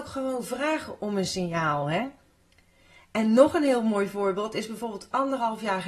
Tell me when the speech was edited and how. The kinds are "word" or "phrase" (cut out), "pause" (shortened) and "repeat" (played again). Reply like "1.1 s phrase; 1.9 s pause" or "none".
none